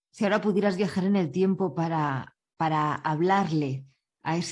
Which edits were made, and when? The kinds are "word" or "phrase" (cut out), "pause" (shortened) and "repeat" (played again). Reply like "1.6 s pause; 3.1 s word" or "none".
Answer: none